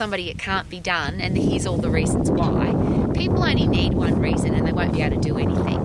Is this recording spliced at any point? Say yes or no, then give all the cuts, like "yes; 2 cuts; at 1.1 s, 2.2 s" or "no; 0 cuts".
no; 0 cuts